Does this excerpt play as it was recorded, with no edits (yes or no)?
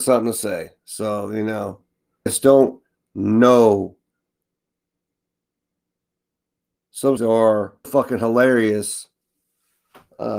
no